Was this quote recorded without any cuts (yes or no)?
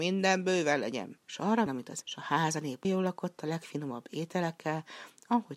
no